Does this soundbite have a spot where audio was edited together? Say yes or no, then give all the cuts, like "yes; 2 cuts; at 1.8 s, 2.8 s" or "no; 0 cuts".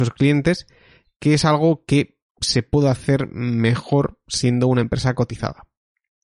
no; 0 cuts